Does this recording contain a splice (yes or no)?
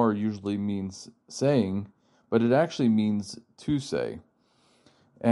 no